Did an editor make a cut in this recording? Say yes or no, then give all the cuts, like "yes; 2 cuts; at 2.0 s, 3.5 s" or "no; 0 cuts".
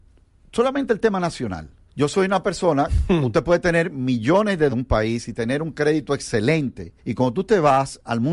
yes; 3 cuts; at 1.9 s, 4.7 s, 7.0 s